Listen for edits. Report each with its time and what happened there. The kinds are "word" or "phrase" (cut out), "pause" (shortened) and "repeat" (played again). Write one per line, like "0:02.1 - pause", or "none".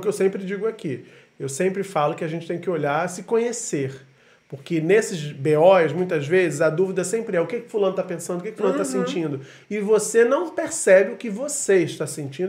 none